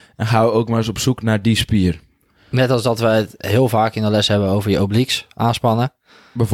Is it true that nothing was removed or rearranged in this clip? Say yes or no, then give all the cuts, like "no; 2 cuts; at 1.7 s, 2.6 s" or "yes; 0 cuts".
yes; 0 cuts